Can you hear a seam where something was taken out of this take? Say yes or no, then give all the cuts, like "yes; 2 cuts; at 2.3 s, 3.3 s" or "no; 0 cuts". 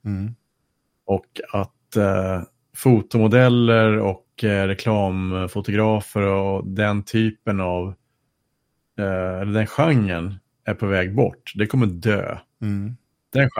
no; 0 cuts